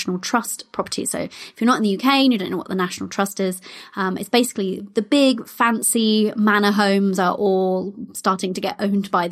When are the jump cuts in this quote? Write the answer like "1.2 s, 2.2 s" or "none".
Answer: none